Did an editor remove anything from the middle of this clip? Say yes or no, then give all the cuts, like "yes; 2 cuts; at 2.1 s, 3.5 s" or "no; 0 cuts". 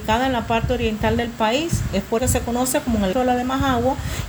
yes; 2 cuts; at 2.2 s, 3.1 s